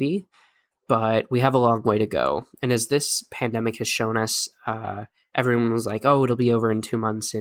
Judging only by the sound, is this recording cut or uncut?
uncut